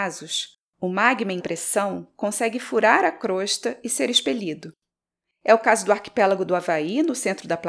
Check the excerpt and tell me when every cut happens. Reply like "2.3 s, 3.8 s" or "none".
1.4 s